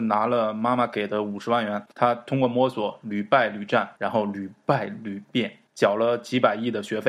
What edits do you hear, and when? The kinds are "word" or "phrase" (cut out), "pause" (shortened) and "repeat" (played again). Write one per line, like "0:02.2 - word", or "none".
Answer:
0:01.9 - pause
0:04.0 - pause
0:05.7 - pause